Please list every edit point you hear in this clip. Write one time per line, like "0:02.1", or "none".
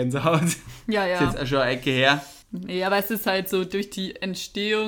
0:02.4